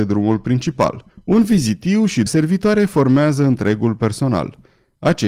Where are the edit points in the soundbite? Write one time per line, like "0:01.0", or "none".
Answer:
0:02.3